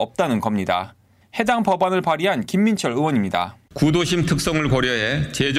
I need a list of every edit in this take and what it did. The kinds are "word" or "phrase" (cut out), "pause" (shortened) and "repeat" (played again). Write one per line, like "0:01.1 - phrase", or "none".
none

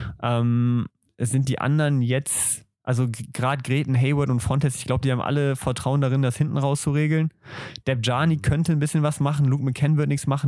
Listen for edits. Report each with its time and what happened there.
none

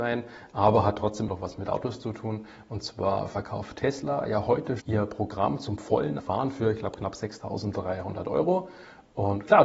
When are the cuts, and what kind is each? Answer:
0:01.3 - word
0:04.8 - word
0:06.2 - word

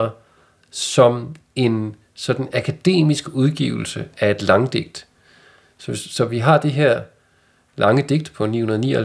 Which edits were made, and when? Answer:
none

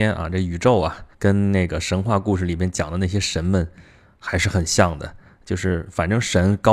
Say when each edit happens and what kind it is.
0:01.1 - pause

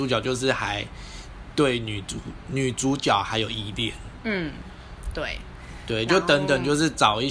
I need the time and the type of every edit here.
none

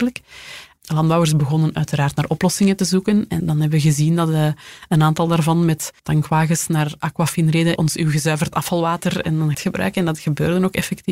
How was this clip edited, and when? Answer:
0:06.0 - pause
0:07.0 - word
0:07.8 - phrase
0:09.5 - phrase

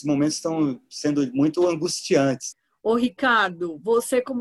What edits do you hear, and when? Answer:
none

